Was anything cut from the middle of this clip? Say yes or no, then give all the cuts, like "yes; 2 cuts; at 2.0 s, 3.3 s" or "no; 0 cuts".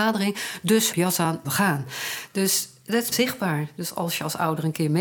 yes; 3 cuts; at 0.9 s, 1.4 s, 3.1 s